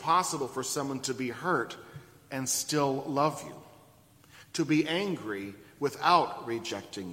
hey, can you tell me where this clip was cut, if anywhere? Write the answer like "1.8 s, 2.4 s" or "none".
none

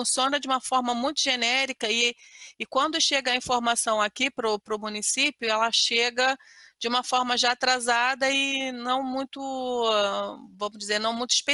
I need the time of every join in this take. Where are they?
none

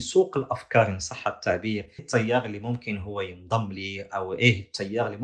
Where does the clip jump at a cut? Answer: 2.0 s

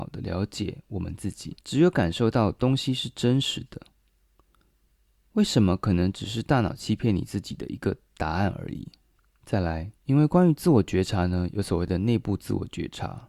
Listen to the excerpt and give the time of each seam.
1.6 s, 9.1 s, 10.0 s

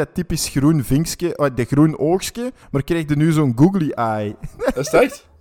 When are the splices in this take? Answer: 2.6 s

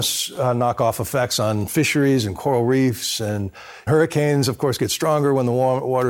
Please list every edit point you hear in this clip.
3.9 s

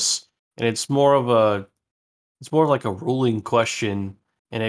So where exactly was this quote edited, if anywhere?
none

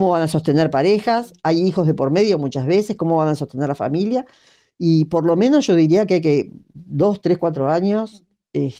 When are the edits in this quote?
none

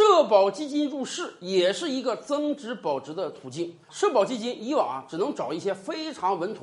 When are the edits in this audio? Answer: 3.8 s

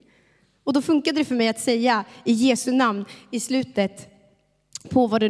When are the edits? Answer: none

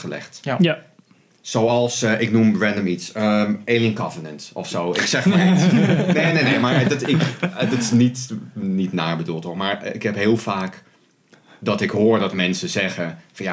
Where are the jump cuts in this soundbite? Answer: none

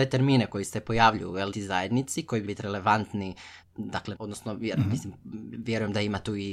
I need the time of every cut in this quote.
1.5 s, 2.4 s, 3.6 s, 4.1 s

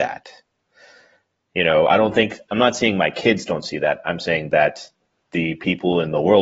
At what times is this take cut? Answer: none

